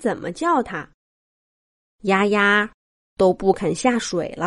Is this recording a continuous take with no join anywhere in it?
yes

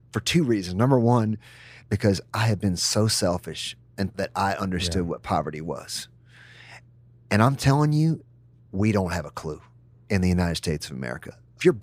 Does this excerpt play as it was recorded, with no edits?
no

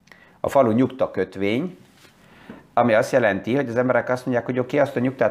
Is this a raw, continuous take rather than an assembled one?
yes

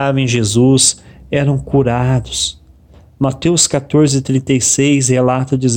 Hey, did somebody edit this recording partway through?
no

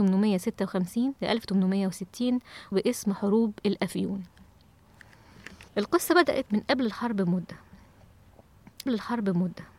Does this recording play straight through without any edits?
no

